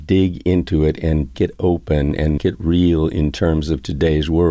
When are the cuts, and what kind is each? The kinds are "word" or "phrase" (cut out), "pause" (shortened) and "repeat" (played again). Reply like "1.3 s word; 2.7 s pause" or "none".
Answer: 1.3 s word; 2.4 s word